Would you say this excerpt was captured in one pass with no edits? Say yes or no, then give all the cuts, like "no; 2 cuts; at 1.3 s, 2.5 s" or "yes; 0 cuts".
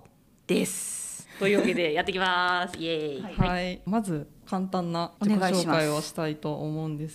no; 3 cuts; at 1.2 s, 3.9 s, 5.2 s